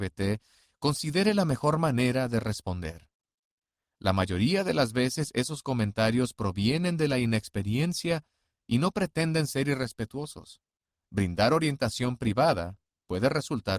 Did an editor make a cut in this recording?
no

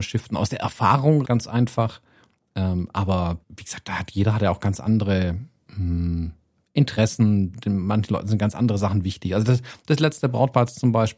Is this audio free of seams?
no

